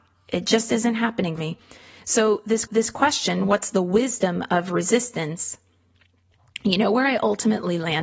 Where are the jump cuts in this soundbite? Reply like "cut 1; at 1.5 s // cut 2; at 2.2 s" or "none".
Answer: cut 1; at 1.4 s // cut 2; at 2.7 s